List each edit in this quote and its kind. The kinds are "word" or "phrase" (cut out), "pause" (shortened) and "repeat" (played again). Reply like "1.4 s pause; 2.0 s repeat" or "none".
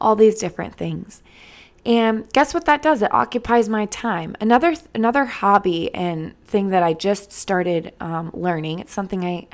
none